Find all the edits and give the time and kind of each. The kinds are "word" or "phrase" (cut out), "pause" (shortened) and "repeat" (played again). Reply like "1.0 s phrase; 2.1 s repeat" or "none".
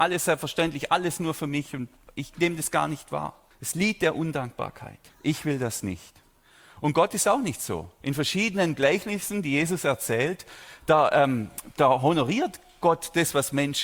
3.5 s pause; 5.1 s pause